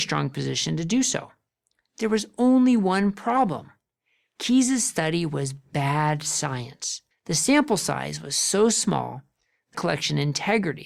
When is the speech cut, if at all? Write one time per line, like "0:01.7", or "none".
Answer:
0:07.1
0:09.7